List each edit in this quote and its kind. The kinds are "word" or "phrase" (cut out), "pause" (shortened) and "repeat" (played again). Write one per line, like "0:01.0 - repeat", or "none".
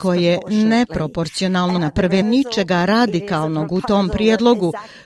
0:01.8 - word
0:02.2 - phrase